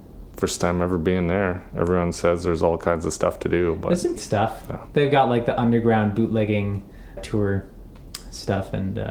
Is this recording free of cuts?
no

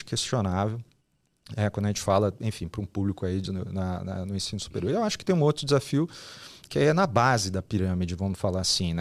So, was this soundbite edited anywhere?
no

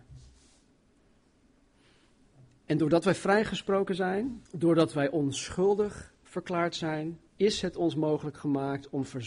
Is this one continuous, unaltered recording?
no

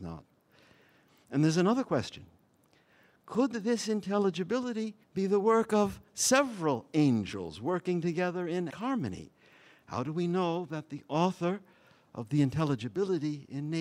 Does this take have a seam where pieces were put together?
yes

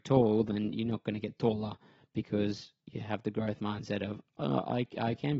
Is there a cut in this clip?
no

